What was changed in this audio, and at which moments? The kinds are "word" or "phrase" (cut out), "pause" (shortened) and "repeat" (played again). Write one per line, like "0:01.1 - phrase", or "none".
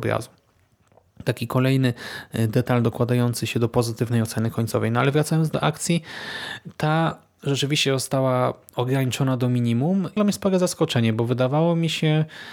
0:10.2 - phrase